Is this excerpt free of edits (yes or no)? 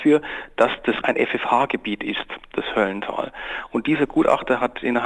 no